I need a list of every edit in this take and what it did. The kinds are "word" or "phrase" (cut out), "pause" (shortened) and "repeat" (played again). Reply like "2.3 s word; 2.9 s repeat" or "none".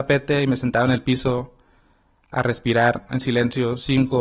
none